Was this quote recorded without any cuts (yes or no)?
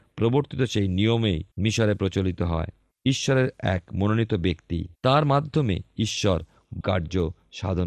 no